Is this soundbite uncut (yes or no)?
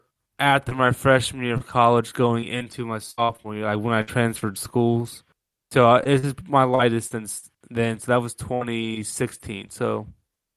yes